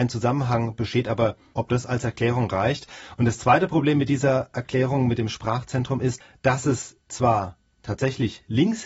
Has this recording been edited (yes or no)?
no